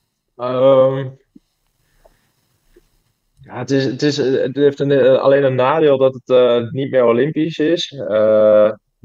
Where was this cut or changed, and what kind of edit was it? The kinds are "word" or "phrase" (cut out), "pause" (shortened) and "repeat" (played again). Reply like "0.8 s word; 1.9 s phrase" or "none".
none